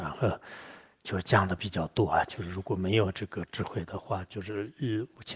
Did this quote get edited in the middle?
no; 0 cuts

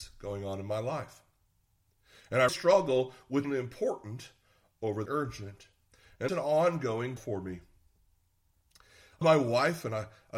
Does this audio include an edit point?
yes; 6 cuts; at 2.5 s, 3.4 s, 5.1 s, 6.3 s, 7.2 s, 9.2 s

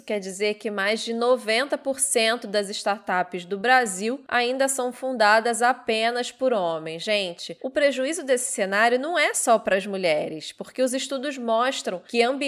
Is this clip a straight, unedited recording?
yes; 0 cuts

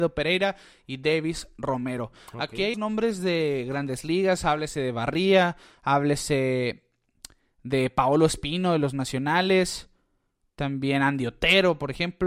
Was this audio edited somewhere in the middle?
yes; 1 cut; at 2.7 s

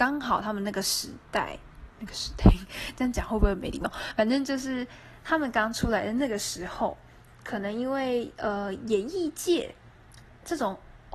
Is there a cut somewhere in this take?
yes; 1 cut; at 1.2 s

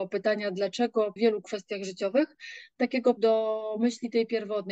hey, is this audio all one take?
no; 2 cuts; at 1.2 s, 3.2 s

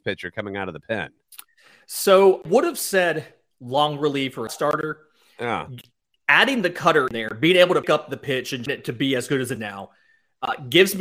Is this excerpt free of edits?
no; 7 cuts; at 2.4 s, 3.5 s, 4.5 s, 7.1 s, 7.8 s, 8.7 s, 9.6 s

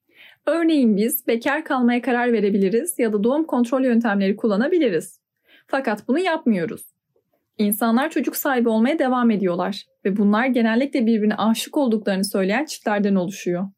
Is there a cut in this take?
no; 0 cuts

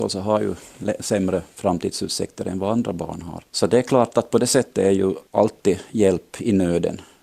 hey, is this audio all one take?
no; 2 cuts; at 3.5 s, 5.3 s

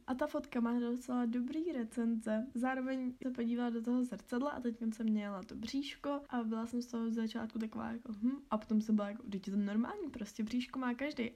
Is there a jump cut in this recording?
yes; 1 cut; at 3.2 s

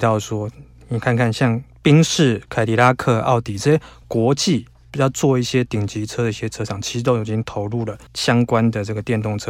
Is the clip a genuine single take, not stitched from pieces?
no; 1 cut; at 8.1 s

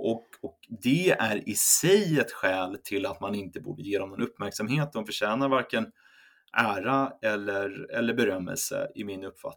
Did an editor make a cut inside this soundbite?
no; 0 cuts

